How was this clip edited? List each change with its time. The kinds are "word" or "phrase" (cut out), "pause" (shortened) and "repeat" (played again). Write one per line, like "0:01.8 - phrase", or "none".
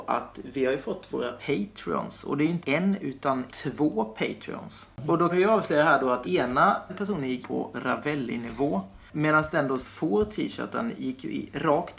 0:01.4 - word
0:02.6 - word
0:03.5 - word
0:05.3 - word
0:06.2 - word
0:07.4 - word
0:07.7 - word
0:09.8 - word